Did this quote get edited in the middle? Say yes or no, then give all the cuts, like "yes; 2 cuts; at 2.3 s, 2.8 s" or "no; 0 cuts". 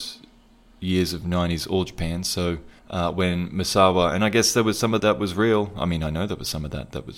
yes; 2 cuts; at 2.8 s, 5.0 s